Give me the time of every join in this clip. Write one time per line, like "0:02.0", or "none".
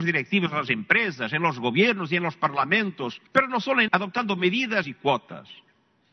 0:03.3
0:03.9
0:04.8

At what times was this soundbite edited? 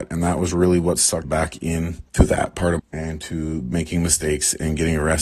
0:01.2
0:02.1
0:02.8

